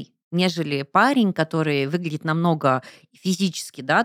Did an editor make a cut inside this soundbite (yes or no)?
no